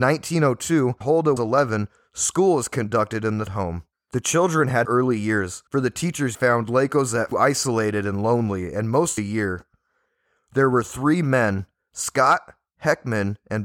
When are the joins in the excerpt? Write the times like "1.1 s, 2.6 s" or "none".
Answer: 1.0 s, 1.4 s, 3.5 s, 3.9 s, 4.8 s, 5.7 s, 6.3 s, 7.3 s, 9.2 s